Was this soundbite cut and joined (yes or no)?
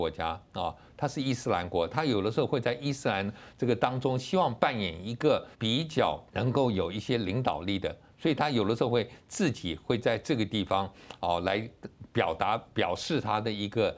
yes